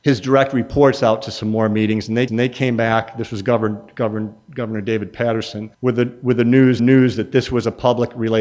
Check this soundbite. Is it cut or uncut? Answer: cut